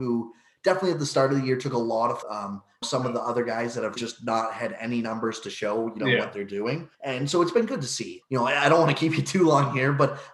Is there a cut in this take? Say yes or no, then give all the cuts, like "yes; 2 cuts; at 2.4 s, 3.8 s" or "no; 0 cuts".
yes; 5 cuts; at 2.2 s, 2.8 s, 4.0 s, 6.9 s, 8.2 s